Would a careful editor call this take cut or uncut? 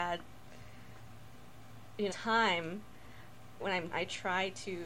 cut